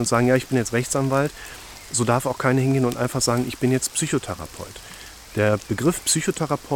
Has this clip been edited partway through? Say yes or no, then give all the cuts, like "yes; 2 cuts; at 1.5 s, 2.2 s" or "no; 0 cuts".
no; 0 cuts